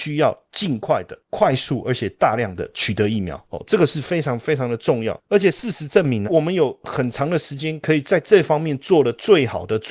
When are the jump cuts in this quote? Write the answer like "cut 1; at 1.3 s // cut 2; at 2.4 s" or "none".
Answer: cut 1; at 6.2 s